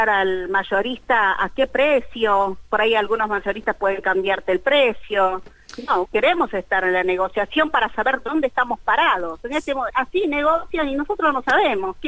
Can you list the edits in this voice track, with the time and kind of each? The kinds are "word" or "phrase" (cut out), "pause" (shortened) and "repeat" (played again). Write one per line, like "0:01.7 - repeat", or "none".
0:02.7 - pause
0:06.0 - word
0:09.9 - word